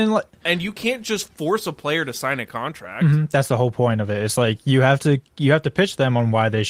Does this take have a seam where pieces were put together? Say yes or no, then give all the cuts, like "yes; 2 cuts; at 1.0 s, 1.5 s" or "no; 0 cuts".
no; 0 cuts